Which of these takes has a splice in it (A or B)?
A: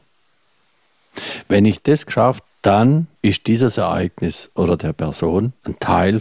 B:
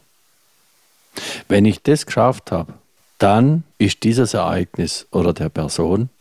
A